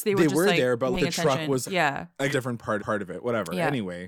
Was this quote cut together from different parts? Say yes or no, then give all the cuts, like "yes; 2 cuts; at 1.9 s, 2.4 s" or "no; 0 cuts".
yes; 4 cuts; at 0.9 s, 1.6 s, 2.3 s, 2.8 s